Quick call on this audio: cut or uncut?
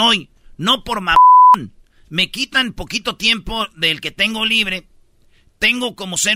uncut